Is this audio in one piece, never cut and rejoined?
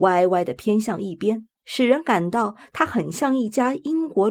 no; 1 cut; at 1.6 s

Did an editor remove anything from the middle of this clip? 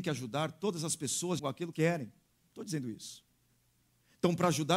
yes; 3 cuts; at 1.4 s, 1.7 s, 2.3 s

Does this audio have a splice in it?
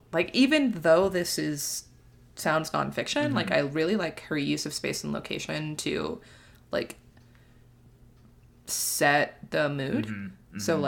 no; 0 cuts

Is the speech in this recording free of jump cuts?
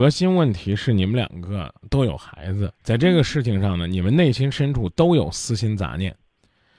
no; 1 cut; at 2.8 s

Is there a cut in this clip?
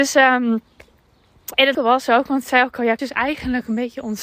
yes; 3 cuts; at 1.7 s, 2.4 s, 3.0 s

